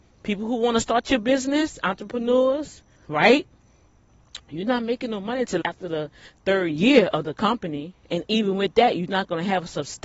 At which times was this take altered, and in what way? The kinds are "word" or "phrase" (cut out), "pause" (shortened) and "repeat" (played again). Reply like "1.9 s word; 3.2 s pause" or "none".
3.0 s pause; 5.6 s word; 8.0 s pause